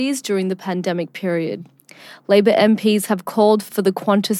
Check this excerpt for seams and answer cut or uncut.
uncut